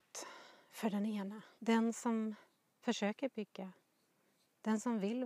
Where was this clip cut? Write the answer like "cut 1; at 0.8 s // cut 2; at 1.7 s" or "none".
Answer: cut 1; at 1.6 s